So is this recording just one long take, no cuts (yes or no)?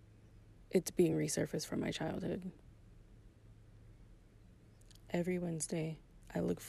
yes